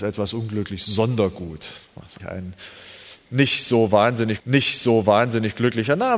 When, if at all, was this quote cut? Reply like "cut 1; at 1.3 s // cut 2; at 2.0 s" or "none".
cut 1; at 1.9 s // cut 2; at 2.2 s // cut 3; at 4.4 s